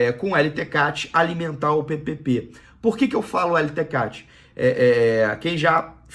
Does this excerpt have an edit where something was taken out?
no; 0 cuts

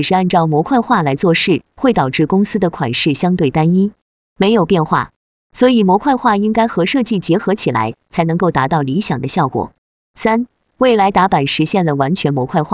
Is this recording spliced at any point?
no; 0 cuts

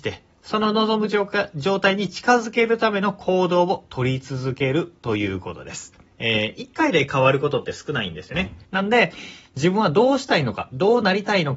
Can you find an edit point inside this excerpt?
yes; 2 cuts; at 6.1 s, 8.6 s

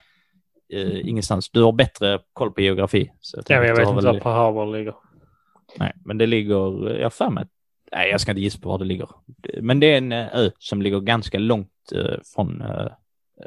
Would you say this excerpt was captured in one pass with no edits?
yes; 0 cuts

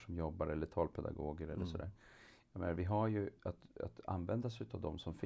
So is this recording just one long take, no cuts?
no; 1 cut; at 3.4 s

